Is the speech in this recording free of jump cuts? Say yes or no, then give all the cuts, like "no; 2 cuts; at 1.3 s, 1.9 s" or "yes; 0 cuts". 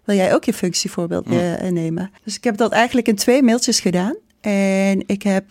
no; 1 cut; at 2.2 s